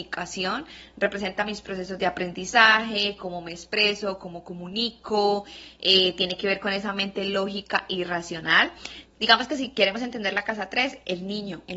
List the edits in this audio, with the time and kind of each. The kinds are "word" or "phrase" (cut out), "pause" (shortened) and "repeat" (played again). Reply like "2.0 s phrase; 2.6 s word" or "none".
9.1 s pause